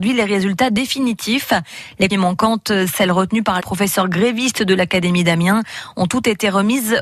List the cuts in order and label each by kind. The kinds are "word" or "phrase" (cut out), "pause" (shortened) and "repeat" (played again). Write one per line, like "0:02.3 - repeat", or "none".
0:02.1 - word
0:03.6 - word